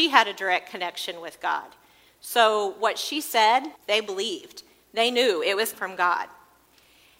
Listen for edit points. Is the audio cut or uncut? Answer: cut